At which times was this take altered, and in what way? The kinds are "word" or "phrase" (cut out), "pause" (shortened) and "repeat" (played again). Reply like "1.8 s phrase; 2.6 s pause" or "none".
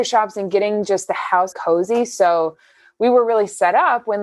1.5 s word